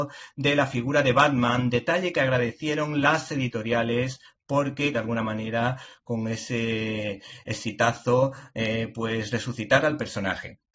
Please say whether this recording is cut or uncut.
cut